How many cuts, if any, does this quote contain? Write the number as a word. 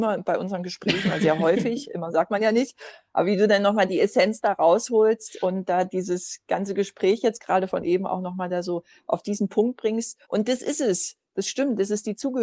one